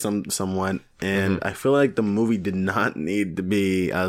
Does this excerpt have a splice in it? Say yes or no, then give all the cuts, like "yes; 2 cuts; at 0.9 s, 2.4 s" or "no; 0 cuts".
no; 0 cuts